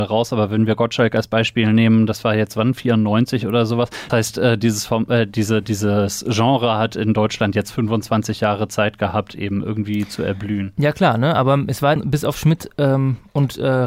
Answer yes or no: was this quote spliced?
yes